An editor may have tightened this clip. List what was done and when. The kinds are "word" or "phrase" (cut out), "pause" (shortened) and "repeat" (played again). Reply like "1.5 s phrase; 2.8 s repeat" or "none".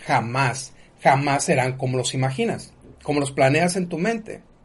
2.9 s pause